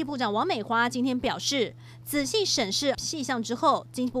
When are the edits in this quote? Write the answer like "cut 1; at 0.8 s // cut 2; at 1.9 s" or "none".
cut 1; at 2.9 s